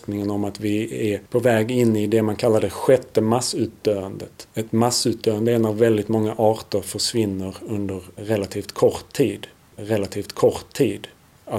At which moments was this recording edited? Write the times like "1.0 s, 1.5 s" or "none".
1.3 s, 4.5 s, 9.7 s